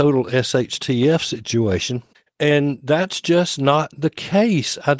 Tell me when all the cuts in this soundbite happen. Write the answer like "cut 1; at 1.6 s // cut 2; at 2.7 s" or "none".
none